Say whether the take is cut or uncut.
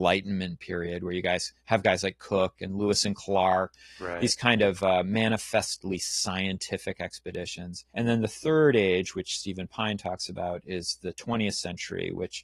cut